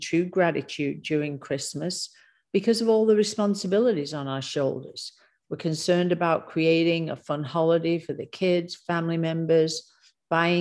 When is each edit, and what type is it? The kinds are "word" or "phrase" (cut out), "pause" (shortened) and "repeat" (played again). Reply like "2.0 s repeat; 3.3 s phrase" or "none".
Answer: none